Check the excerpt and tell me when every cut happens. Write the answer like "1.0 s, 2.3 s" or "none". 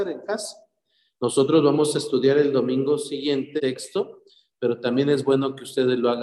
3.6 s